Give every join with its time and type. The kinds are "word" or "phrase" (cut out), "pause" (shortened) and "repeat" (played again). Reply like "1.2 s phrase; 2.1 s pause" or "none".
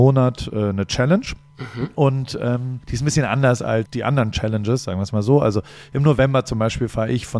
1.5 s pause; 2.8 s pause; 3.9 s word